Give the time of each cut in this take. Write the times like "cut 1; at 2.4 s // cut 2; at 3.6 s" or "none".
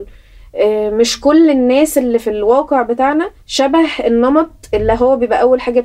cut 1; at 3.4 s

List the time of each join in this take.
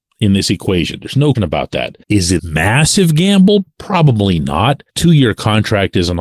cut 1; at 1.3 s // cut 2; at 2.0 s // cut 3; at 2.4 s // cut 4; at 4.9 s

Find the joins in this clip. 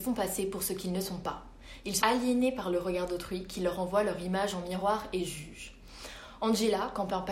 cut 1; at 2.0 s

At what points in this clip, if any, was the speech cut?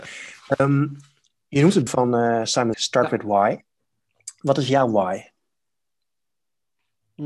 cut 1; at 1.9 s // cut 2; at 2.7 s

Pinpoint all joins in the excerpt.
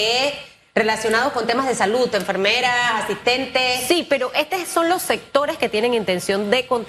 none

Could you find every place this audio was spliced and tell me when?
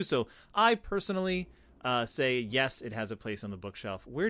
none

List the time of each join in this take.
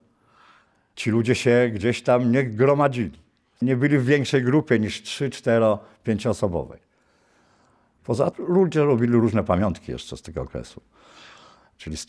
cut 1; at 8.3 s

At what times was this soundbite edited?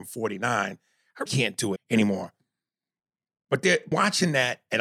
cut 1; at 1.3 s // cut 2; at 1.8 s // cut 3; at 3.9 s

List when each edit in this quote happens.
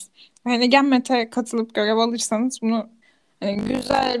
cut 1; at 3.0 s

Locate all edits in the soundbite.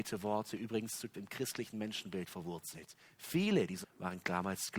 cut 1; at 1.1 s // cut 2; at 3.8 s

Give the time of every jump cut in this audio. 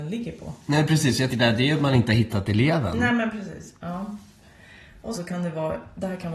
cut 1; at 1.3 s // cut 2; at 5.1 s

